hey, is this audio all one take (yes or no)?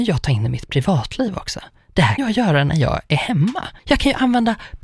no